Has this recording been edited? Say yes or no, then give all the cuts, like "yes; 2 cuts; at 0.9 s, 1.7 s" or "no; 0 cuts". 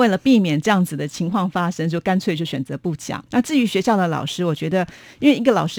yes; 1 cut; at 3.3 s